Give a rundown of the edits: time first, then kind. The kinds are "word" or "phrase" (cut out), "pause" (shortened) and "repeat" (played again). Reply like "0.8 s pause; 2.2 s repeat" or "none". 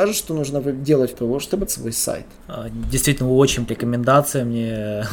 1.1 s phrase; 1.7 s word; 2.4 s pause; 3.7 s word